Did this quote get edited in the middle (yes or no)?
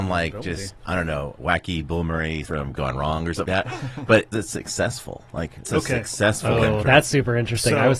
yes